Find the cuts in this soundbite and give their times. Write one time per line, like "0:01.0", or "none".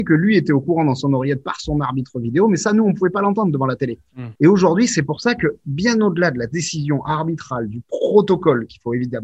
0:04.4